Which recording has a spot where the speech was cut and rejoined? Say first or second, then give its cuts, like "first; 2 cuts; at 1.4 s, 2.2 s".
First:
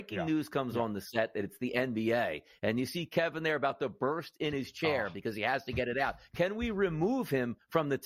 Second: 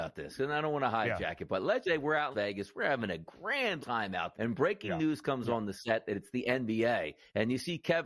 second; 4 cuts; at 1.8 s, 2.3 s, 3.8 s, 4.3 s